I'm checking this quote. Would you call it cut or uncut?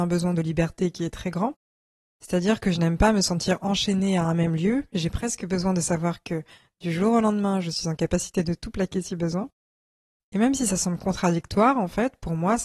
uncut